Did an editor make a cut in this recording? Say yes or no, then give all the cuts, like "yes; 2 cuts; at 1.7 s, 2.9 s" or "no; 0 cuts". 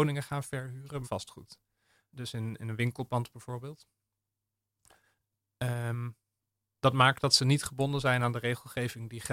yes; 1 cut; at 1.0 s